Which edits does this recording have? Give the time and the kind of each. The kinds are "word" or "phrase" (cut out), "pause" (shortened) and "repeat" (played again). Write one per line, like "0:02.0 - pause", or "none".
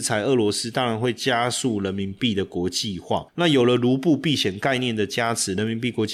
none